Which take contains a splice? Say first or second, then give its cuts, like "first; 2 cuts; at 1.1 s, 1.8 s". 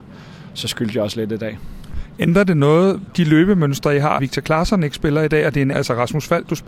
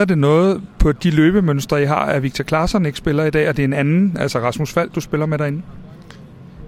first; 3 cuts; at 3.1 s, 4.2 s, 5.7 s